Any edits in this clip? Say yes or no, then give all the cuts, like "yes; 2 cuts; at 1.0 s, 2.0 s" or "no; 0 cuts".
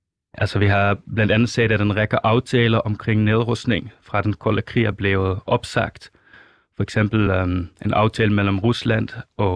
no; 0 cuts